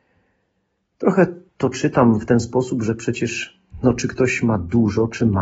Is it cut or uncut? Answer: cut